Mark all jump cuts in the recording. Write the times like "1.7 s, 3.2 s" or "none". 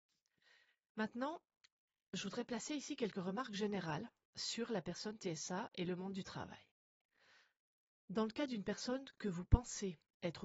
none